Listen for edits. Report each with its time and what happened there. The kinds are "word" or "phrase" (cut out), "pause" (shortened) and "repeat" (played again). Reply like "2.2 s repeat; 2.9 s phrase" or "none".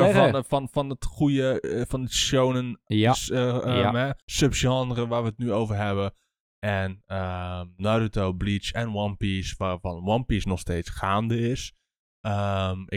4.2 s pause

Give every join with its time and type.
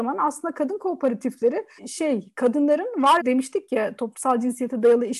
1.8 s word; 3.2 s phrase

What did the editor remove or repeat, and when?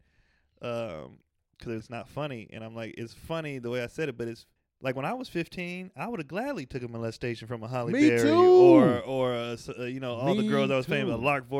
1.8 s word; 4.6 s pause

